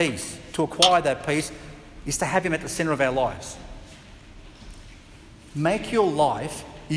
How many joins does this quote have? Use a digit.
0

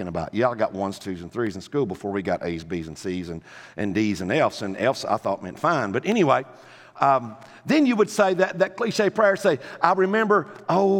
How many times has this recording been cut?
0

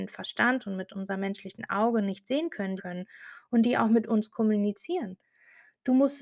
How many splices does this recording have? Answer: 1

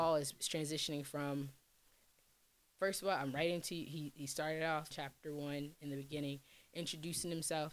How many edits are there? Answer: 1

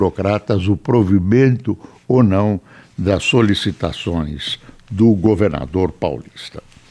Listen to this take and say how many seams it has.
0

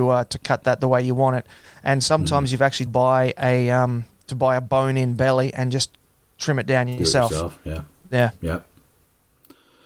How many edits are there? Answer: 1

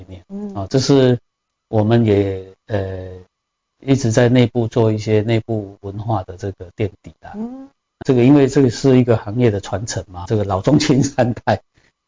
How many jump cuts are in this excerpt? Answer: 2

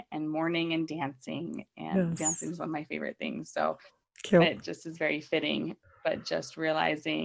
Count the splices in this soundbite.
0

